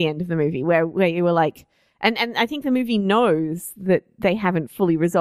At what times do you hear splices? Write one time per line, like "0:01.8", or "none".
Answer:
none